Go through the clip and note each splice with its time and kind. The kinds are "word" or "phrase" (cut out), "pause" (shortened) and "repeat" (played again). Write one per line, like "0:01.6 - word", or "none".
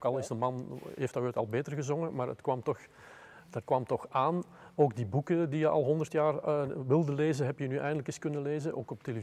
none

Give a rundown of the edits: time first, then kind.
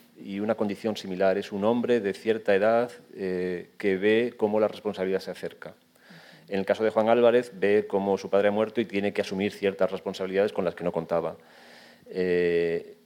none

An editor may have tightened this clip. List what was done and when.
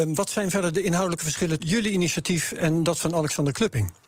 0:01.6 - word

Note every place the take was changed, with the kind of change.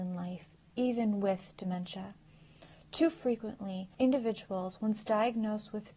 0:03.9 - pause

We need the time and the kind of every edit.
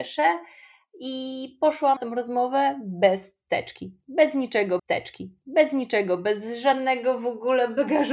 0:02.0 - word
0:04.8 - repeat

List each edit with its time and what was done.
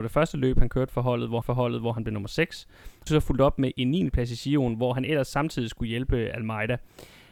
0:01.4 - repeat
0:03.1 - phrase

